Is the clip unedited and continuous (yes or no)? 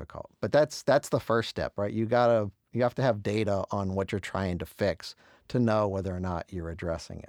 yes